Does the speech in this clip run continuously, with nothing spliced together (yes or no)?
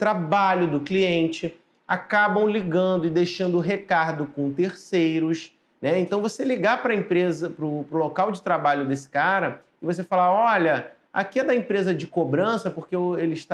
yes